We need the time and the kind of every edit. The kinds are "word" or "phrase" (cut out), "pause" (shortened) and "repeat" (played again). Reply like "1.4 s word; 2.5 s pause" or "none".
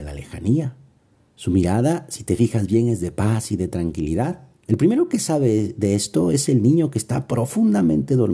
1.0 s pause; 4.6 s pause